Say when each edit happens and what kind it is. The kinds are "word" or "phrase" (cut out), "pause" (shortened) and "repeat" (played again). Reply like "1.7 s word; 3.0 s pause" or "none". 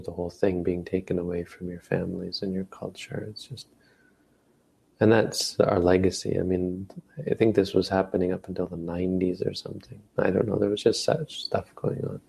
10.1 s pause